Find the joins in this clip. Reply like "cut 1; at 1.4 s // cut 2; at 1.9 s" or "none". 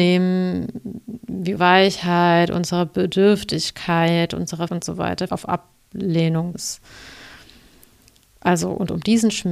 cut 1; at 1.6 s // cut 2; at 4.7 s // cut 3; at 5.3 s // cut 4; at 6.5 s

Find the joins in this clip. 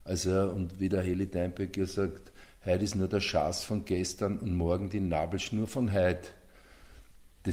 none

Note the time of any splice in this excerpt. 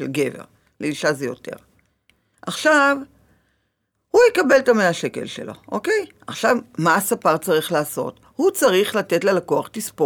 none

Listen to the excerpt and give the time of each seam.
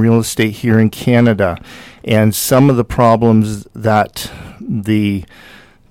none

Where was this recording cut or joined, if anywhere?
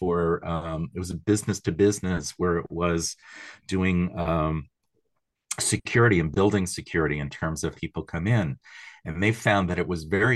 cut 1; at 7.7 s

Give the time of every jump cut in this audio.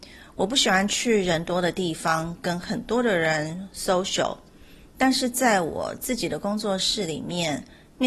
none

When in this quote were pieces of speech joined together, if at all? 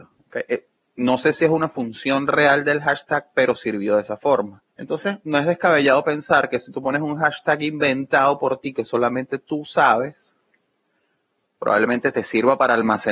cut 1; at 4.7 s

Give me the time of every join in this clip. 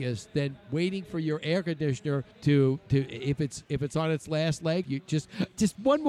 cut 1; at 2.3 s // cut 2; at 4.8 s

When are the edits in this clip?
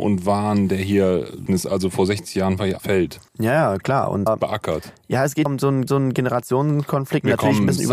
cut 1; at 1.5 s // cut 2; at 2.8 s // cut 3; at 3.3 s // cut 4; at 4.3 s // cut 5; at 5.5 s // cut 6; at 5.9 s

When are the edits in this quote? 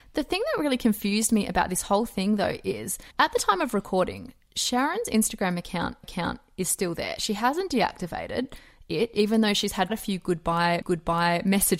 cut 1; at 3.1 s // cut 2; at 6.0 s // cut 3; at 9.9 s // cut 4; at 10.8 s

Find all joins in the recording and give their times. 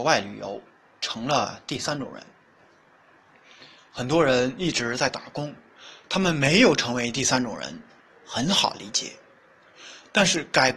none

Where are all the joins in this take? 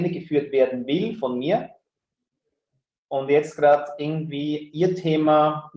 none

